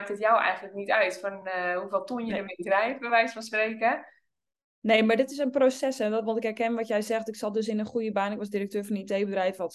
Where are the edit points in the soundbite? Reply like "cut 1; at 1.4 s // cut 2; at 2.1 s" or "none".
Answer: none

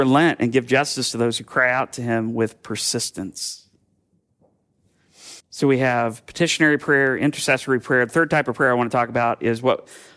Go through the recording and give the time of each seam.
cut 1; at 5.4 s

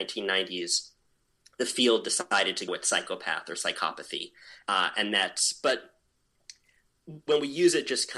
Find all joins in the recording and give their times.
cut 1; at 2.7 s

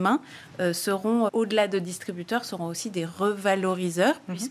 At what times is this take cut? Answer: cut 1; at 1.3 s

